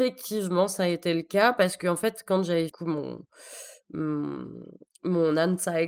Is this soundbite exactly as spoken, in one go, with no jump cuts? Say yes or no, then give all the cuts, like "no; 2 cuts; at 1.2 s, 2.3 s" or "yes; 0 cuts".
no; 1 cut; at 2.7 s